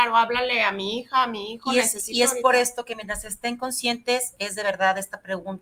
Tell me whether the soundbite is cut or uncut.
uncut